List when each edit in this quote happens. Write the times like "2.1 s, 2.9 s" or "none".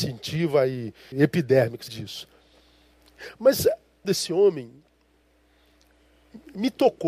1.1 s, 1.9 s, 4.0 s